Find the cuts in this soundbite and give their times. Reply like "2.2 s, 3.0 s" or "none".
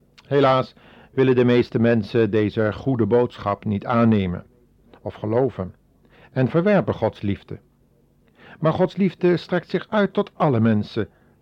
none